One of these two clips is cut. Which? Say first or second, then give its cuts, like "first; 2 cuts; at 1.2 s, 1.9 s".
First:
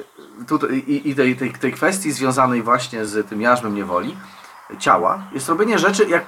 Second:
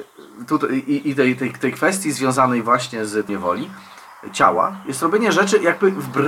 second; 1 cut; at 3.3 s